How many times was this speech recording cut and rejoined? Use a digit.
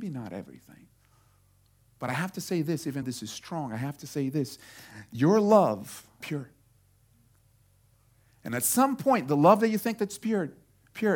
2